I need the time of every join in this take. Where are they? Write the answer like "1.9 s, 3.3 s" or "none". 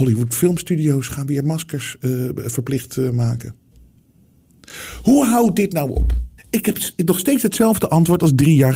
6.4 s